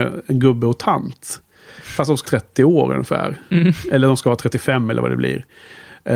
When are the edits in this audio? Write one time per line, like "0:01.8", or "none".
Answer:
0:02.2